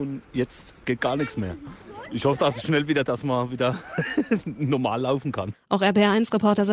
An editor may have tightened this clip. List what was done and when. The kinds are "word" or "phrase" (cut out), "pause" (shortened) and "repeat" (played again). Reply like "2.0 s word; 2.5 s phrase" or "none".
3.0 s word